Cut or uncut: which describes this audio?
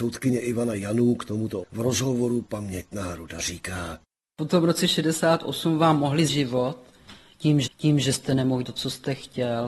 cut